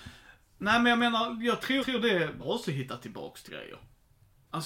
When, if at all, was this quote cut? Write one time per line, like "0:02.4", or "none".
0:01.8
0:02.4
0:03.5